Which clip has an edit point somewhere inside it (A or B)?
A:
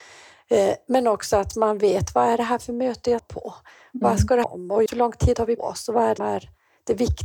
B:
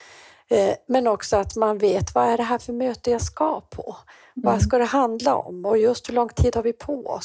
A